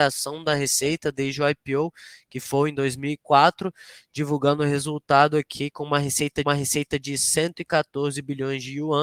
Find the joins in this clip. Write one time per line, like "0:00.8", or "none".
0:06.4

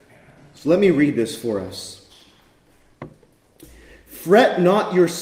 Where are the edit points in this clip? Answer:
none

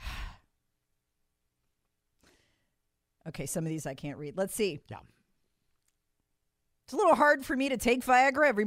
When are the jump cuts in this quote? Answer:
none

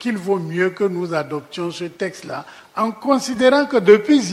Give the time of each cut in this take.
none

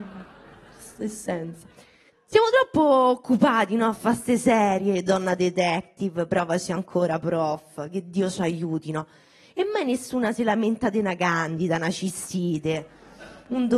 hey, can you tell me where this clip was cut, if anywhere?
0:02.1

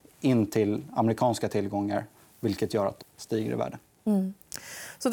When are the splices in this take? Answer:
0:03.0

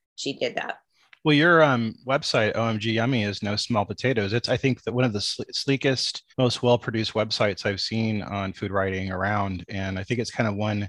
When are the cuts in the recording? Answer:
0:06.3

